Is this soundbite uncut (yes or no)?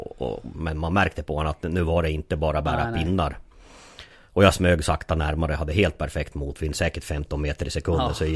yes